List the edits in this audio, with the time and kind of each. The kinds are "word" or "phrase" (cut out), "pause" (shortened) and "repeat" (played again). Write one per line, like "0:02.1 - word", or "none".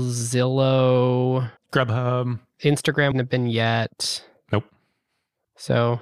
0:01.6 - pause
0:03.1 - word